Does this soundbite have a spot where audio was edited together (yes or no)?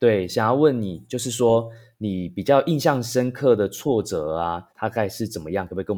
yes